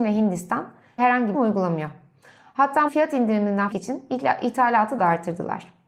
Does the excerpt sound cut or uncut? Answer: cut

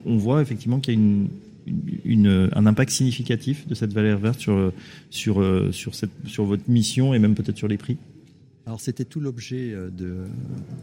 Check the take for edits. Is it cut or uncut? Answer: uncut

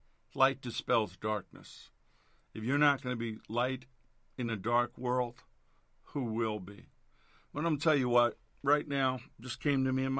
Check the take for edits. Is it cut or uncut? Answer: uncut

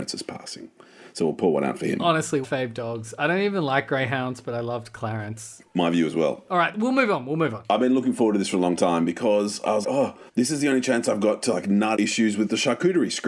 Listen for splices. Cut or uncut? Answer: cut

